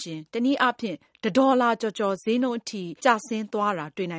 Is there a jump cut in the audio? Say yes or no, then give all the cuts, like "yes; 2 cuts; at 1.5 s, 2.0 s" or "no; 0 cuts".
yes; 1 cut; at 3.0 s